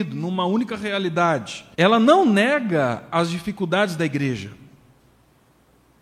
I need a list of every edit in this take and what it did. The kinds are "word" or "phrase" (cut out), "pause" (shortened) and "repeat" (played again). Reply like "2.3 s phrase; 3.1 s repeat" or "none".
1.7 s pause